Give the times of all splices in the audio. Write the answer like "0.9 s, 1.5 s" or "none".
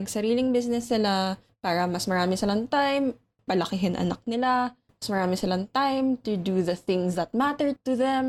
none